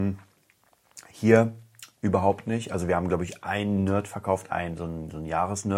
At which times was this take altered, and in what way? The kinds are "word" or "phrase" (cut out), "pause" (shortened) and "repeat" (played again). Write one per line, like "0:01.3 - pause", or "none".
none